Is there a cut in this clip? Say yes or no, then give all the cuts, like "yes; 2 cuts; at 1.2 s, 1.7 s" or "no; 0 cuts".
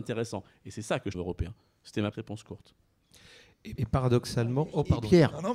yes; 3 cuts; at 1.1 s, 2.1 s, 3.8 s